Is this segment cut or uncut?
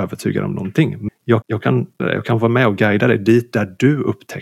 cut